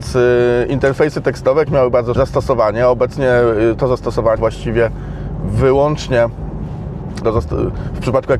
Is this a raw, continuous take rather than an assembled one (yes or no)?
no